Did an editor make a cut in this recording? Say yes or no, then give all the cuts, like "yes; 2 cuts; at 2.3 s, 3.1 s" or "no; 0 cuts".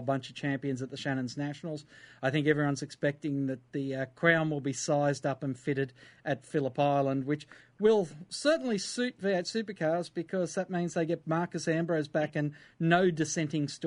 no; 0 cuts